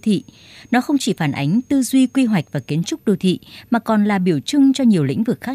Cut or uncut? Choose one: uncut